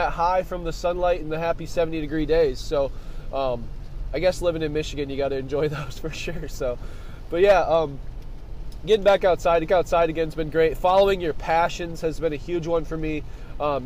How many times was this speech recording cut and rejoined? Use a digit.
1